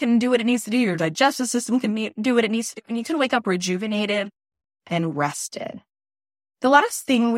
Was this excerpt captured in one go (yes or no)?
yes